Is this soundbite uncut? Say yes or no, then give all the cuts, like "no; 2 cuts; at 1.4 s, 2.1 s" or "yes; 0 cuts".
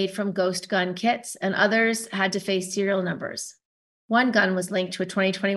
yes; 0 cuts